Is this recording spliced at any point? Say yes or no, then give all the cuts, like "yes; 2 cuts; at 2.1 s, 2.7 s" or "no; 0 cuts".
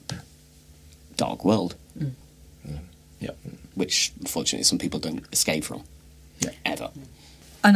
no; 0 cuts